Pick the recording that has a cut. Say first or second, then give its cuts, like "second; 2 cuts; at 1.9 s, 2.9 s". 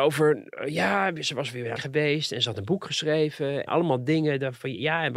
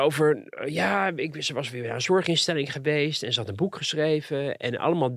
first; 3 cuts; at 1.2 s, 1.8 s, 3.7 s